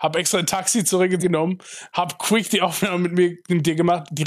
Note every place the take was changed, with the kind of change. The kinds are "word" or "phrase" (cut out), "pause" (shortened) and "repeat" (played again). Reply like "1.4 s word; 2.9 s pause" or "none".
1.2 s word

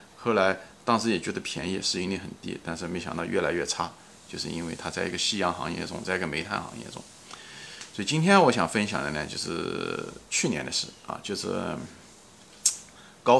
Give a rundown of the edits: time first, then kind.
10.3 s pause

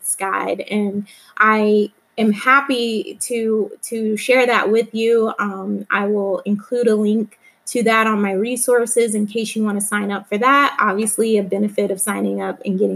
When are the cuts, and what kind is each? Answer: none

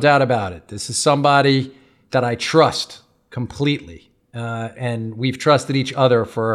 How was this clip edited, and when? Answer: 4.7 s word

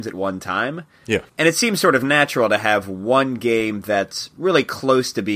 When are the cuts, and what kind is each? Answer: 1.3 s pause

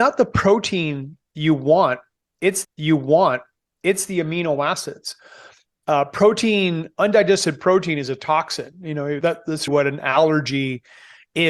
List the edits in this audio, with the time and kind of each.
2.6 s repeat; 9.2 s word; 9.7 s word

